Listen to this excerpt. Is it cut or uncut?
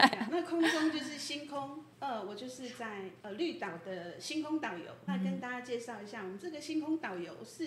cut